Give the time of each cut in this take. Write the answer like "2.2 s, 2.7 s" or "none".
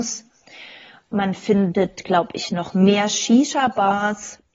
none